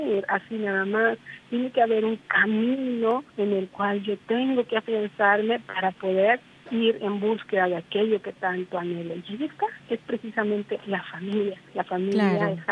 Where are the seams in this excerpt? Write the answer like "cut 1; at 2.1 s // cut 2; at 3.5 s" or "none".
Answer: cut 1; at 3.3 s // cut 2; at 6.4 s // cut 3; at 11.7 s

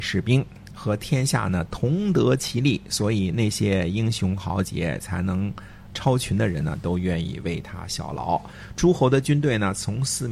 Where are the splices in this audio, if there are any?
cut 1; at 5.9 s

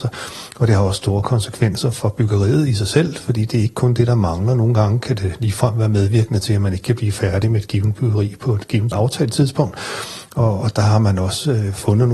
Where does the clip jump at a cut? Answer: cut 1; at 8.9 s

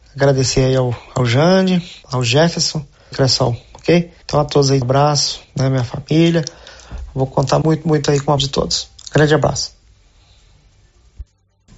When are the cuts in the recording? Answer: cut 1; at 2.0 s // cut 2; at 3.1 s // cut 3; at 4.2 s // cut 4; at 4.8 s // cut 5; at 5.4 s // cut 6; at 7.6 s // cut 7; at 8.4 s // cut 8; at 9.0 s

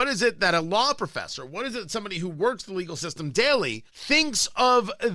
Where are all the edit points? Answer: cut 1; at 3.9 s

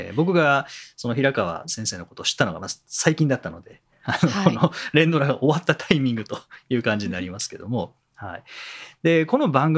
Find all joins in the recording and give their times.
none

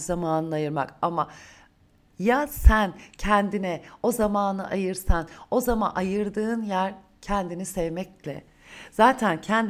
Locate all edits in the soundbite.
none

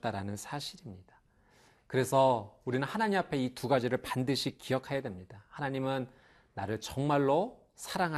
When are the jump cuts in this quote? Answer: none

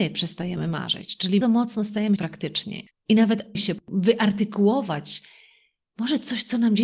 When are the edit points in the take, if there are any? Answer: cut 1; at 1.4 s // cut 2; at 2.2 s // cut 3; at 2.9 s // cut 4; at 3.6 s

